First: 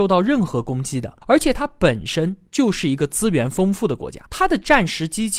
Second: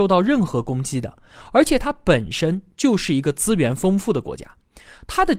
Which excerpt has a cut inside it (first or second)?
first